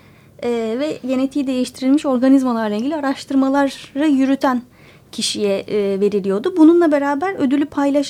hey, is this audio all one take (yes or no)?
yes